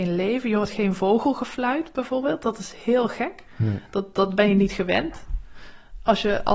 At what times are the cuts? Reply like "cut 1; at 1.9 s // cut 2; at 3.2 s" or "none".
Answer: cut 1; at 3.5 s